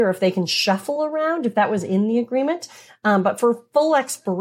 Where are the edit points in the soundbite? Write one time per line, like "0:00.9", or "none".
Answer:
none